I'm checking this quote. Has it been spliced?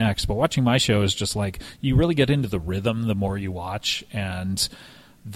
no; 0 cuts

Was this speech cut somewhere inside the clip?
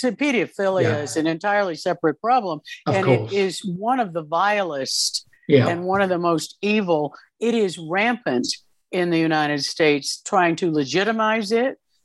no; 0 cuts

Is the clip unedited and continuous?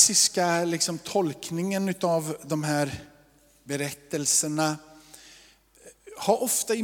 yes; 0 cuts

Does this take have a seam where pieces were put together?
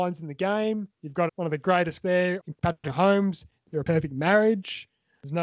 yes; 4 cuts; at 0.9 s, 1.3 s, 2.0 s, 2.4 s

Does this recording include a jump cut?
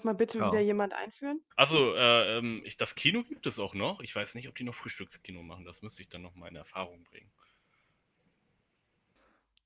yes; 1 cut; at 1.5 s

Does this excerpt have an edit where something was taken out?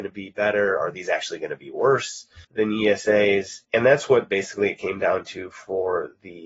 yes; 2 cuts; at 2.4 s, 3.6 s

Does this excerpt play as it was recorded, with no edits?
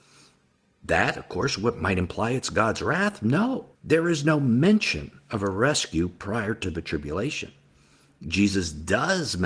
no; 1 cut; at 3.7 s

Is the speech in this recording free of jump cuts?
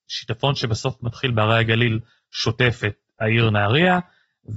yes; 0 cuts

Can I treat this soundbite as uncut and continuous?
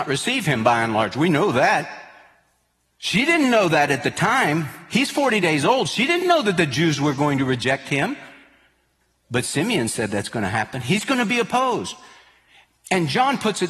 yes; 0 cuts

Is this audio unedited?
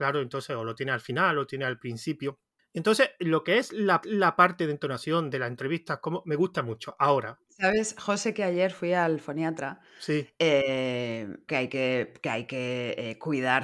no; 3 cuts; at 2.6 s, 4.0 s, 11.5 s

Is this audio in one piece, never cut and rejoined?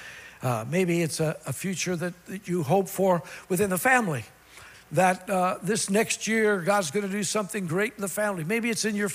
yes; 0 cuts

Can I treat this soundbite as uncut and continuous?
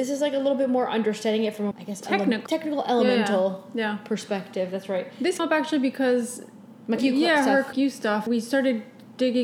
no; 6 cuts; at 1.7 s, 2.5 s, 5.4 s, 7.0 s, 7.7 s, 8.3 s

